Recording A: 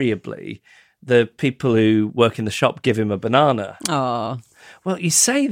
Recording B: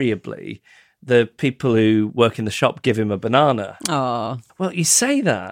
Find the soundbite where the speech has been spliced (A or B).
B